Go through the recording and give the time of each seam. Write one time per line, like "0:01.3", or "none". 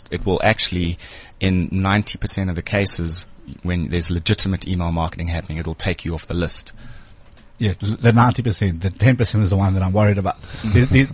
0:03.6